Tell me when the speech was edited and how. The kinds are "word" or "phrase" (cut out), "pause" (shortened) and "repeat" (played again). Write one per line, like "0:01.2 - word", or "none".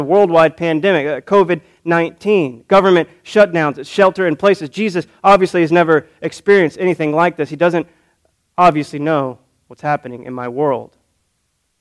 none